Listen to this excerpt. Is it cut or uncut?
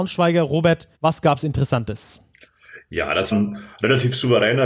cut